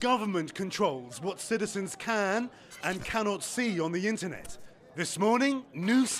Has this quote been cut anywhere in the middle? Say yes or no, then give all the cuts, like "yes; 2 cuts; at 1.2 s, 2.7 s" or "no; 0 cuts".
no; 0 cuts